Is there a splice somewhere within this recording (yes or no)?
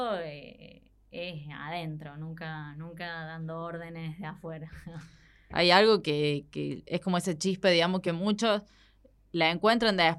no